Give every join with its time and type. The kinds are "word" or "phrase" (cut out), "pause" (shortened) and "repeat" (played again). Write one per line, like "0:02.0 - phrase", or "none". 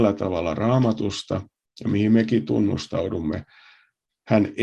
none